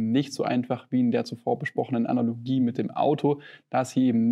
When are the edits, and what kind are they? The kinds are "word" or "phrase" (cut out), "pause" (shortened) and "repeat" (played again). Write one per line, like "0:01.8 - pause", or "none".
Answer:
none